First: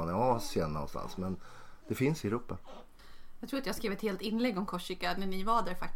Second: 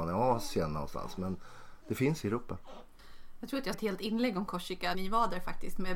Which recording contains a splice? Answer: second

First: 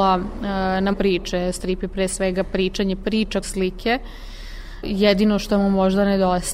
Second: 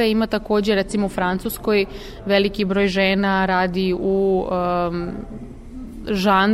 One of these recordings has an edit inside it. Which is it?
first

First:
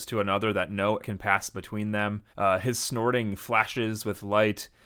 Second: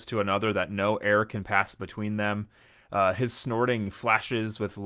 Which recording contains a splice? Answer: first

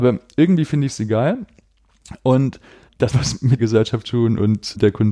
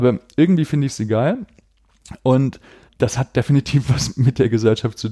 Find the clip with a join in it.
first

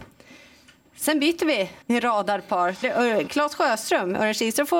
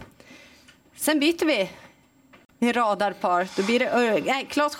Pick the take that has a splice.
first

